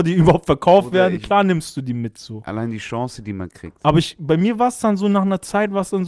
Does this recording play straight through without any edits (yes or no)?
yes